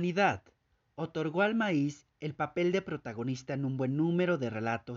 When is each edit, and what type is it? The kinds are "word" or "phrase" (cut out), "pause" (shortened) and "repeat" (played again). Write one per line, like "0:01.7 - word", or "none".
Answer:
none